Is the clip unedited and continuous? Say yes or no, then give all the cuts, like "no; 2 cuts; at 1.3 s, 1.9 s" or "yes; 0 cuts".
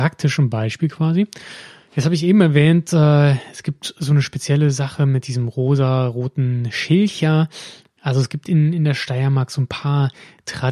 yes; 0 cuts